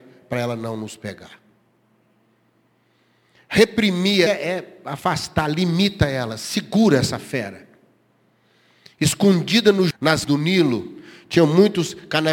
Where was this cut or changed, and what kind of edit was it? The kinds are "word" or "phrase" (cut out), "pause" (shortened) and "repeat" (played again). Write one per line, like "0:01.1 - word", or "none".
0:04.3 - word
0:09.9 - word
0:10.2 - word